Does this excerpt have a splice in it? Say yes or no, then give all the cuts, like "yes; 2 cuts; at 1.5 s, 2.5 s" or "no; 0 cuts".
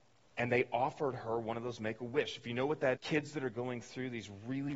yes; 1 cut; at 3.0 s